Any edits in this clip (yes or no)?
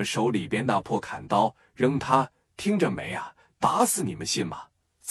no